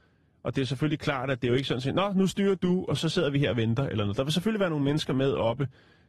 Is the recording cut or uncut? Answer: uncut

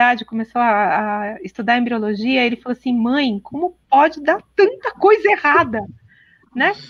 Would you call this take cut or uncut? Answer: uncut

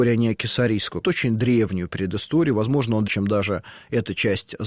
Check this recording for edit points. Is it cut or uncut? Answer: cut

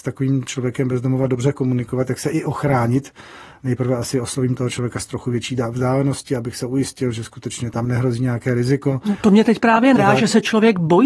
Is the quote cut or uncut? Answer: cut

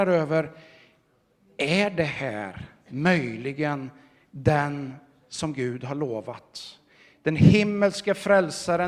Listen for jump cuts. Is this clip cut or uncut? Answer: uncut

